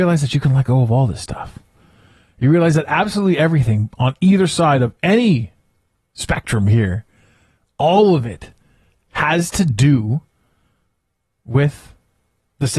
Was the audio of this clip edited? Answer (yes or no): no